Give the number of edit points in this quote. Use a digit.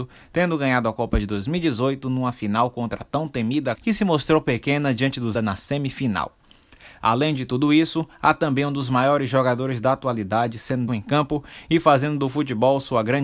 3